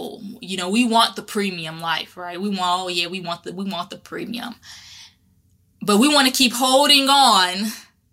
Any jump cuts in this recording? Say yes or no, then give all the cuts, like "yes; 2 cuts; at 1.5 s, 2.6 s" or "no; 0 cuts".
no; 0 cuts